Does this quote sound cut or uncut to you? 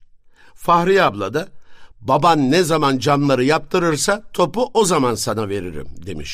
uncut